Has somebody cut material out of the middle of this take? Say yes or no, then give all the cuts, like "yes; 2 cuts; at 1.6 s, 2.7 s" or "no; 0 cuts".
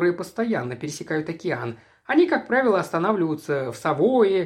no; 0 cuts